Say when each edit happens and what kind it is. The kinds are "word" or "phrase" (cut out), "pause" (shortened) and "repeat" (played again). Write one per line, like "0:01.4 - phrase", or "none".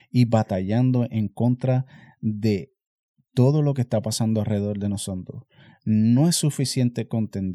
none